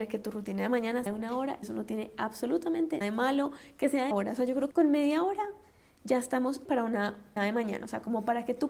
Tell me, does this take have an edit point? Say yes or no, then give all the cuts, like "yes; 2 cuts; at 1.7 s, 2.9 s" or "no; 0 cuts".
yes; 7 cuts; at 1.1 s, 1.6 s, 3.0 s, 4.1 s, 4.7 s, 6.6 s, 7.4 s